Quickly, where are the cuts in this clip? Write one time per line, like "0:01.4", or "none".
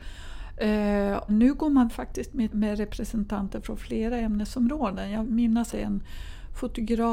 0:01.3
0:01.9
0:02.5
0:05.2
0:05.7